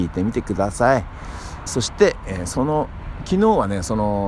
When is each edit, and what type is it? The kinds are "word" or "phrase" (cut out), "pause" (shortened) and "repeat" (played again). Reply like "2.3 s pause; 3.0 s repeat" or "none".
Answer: 1.7 s phrase